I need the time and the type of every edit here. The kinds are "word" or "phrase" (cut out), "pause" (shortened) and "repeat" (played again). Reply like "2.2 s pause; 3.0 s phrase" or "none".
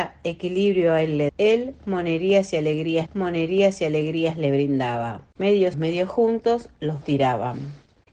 1.3 s word; 3.1 s repeat; 5.7 s word; 7.0 s word